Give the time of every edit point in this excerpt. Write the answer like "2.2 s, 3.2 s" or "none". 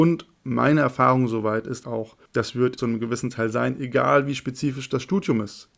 1.8 s, 2.3 s, 2.8 s